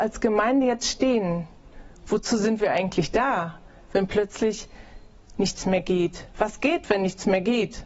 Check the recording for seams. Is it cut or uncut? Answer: uncut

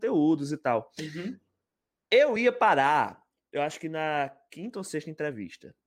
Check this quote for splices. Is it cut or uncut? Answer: uncut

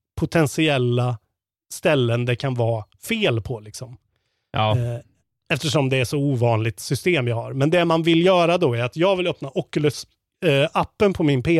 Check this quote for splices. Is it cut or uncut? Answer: uncut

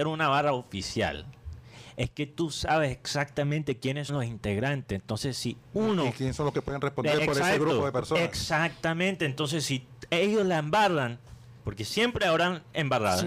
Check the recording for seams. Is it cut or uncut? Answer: cut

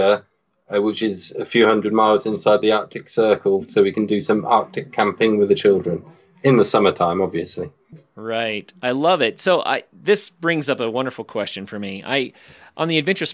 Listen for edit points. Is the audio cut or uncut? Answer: uncut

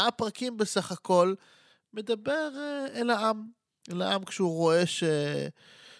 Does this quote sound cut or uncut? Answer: uncut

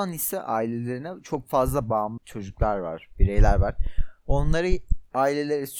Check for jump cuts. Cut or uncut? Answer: cut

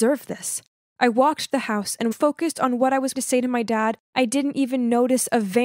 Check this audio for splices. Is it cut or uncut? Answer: cut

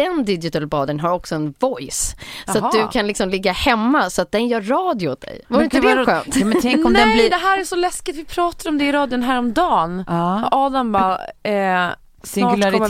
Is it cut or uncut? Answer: cut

